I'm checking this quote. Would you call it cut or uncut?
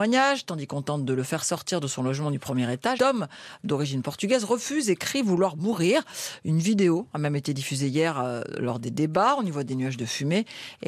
cut